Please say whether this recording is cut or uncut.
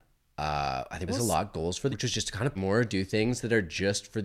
cut